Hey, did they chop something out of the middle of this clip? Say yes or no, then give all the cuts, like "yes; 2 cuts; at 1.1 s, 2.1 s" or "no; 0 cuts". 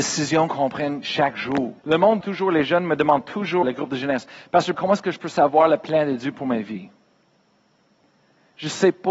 yes; 4 cuts; at 1.8 s, 2.2 s, 3.6 s, 4.7 s